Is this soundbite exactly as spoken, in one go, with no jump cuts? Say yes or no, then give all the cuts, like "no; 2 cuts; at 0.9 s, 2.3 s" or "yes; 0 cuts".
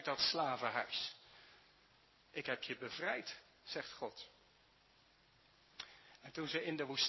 yes; 0 cuts